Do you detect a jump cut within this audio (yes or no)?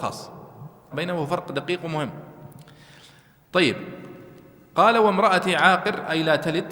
yes